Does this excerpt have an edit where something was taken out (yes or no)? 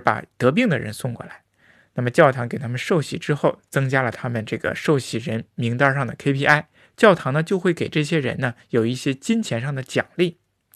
no